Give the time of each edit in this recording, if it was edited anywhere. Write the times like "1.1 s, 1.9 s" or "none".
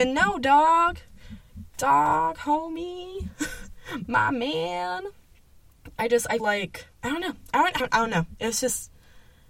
6.4 s, 6.9 s, 7.8 s